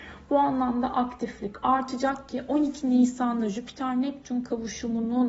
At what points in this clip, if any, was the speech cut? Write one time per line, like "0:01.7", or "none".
none